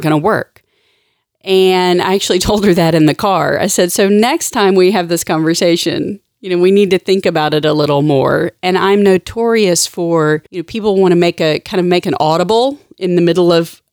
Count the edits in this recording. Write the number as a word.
one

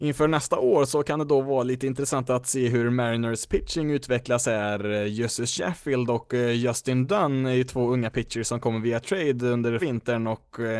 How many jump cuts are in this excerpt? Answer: one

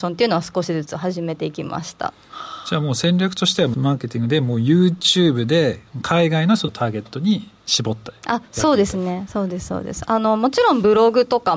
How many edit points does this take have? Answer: two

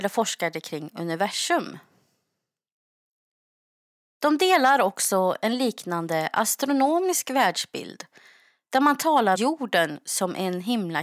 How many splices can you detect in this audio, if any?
one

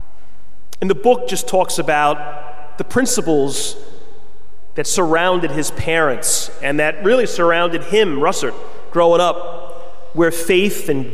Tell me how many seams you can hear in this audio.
zero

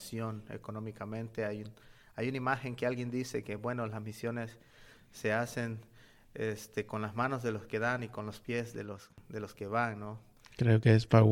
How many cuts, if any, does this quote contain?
zero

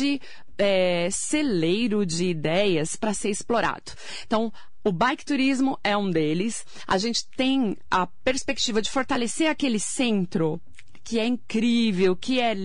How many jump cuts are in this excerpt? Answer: zero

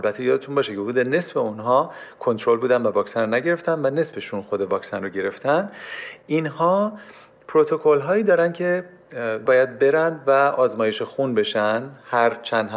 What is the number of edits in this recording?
one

